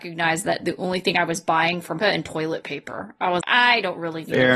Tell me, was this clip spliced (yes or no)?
yes